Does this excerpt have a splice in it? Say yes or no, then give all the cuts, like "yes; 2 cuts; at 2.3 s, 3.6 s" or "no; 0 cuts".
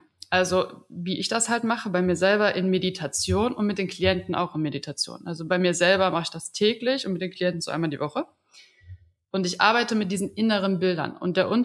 no; 0 cuts